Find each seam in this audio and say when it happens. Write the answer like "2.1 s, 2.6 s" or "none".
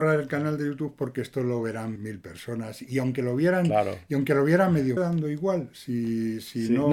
2.0 s, 5.0 s